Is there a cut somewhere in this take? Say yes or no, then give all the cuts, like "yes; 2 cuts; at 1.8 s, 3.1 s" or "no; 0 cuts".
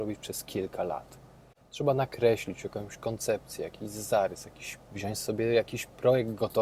yes; 1 cut; at 4.9 s